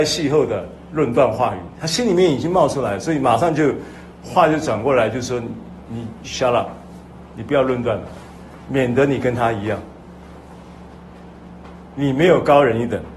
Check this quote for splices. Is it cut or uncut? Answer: uncut